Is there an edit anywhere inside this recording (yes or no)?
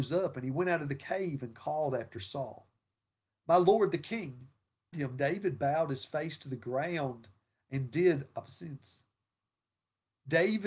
yes